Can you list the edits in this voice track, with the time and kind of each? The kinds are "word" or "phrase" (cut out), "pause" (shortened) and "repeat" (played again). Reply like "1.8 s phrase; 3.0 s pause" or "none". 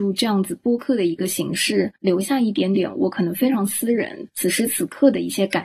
2.0 s pause